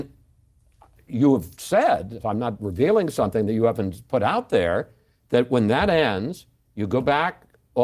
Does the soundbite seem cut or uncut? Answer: uncut